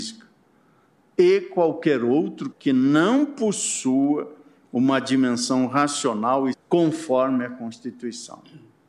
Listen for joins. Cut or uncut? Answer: cut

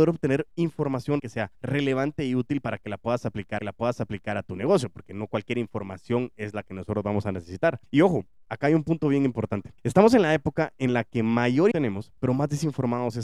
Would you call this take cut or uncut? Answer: cut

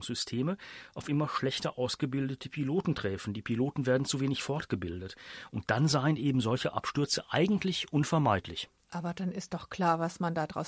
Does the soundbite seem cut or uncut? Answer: uncut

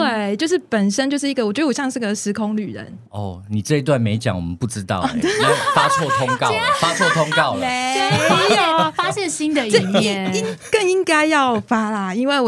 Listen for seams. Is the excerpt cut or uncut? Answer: cut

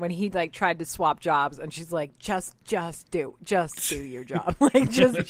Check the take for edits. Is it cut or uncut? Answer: cut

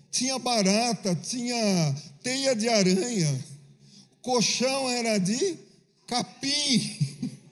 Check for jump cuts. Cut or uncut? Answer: uncut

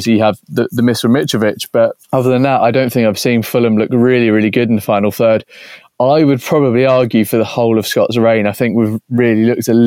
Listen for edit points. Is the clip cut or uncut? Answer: cut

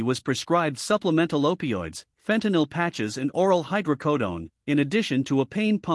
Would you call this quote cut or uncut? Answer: cut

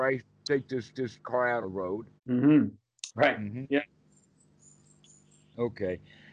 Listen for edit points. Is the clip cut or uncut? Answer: cut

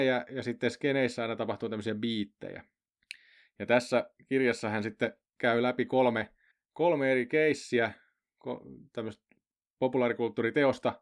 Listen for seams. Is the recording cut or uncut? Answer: uncut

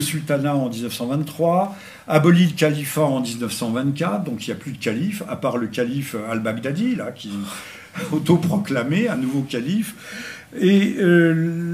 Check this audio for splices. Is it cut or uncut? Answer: uncut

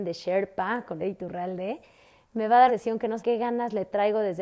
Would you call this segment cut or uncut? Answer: cut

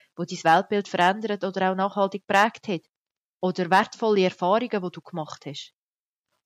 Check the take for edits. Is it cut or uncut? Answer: uncut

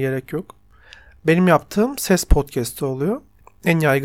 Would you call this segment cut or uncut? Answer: uncut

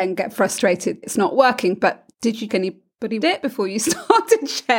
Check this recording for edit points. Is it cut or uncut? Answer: cut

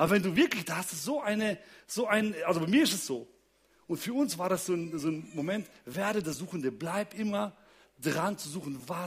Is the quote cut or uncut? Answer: uncut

